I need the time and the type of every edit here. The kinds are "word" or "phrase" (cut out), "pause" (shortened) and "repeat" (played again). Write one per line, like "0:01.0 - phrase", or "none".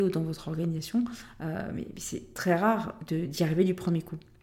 none